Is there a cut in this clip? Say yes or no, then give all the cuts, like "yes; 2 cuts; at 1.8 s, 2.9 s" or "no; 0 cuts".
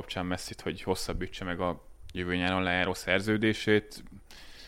no; 0 cuts